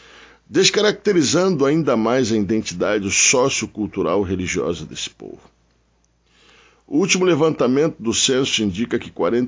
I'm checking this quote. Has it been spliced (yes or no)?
no